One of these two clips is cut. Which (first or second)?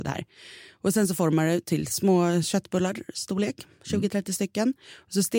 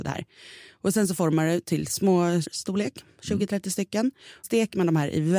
second